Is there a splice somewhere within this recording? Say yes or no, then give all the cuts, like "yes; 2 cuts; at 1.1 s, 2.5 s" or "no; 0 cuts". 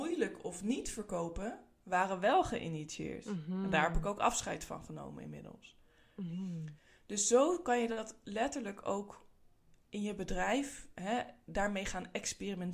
no; 0 cuts